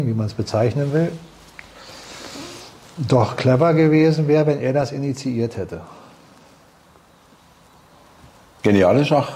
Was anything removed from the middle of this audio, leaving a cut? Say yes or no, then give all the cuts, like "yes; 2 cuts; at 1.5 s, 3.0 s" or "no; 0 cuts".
no; 0 cuts